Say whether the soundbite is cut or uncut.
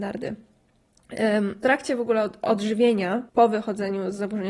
cut